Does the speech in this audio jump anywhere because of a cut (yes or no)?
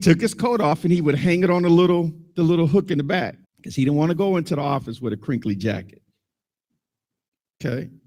yes